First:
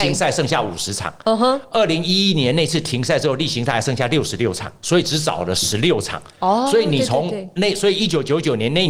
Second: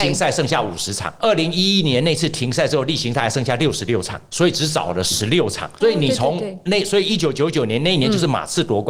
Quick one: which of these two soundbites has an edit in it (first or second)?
second